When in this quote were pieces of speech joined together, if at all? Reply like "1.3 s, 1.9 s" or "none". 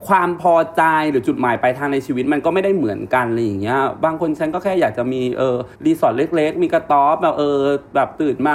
5.7 s